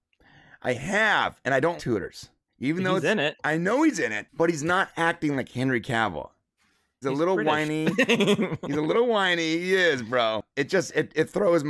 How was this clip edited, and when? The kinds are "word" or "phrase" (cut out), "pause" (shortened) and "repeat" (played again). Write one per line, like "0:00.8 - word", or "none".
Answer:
0:01.8 - word
0:02.5 - pause
0:07.0 - word